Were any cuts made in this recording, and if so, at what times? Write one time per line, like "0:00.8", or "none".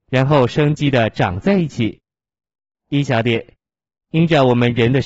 none